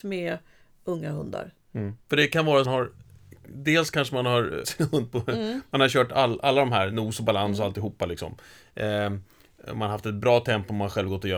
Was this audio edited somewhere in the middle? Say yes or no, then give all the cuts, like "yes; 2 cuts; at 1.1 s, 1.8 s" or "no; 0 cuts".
yes; 3 cuts; at 2.0 s, 2.6 s, 4.6 s